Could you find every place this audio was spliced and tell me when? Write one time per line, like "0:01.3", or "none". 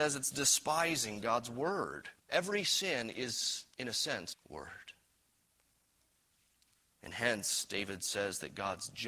0:02.2
0:03.7
0:04.3